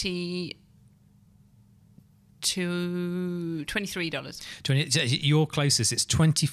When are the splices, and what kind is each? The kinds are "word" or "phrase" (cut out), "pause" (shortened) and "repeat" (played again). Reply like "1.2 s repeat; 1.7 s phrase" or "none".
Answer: none